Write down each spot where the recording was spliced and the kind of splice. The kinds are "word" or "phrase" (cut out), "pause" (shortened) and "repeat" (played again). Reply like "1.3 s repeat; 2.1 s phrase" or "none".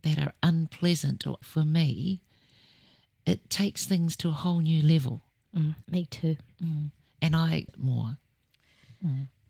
1.4 s word; 5.8 s pause; 7.7 s word